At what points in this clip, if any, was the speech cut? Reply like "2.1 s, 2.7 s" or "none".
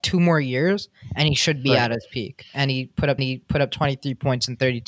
3.2 s